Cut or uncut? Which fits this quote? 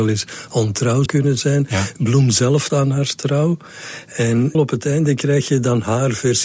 cut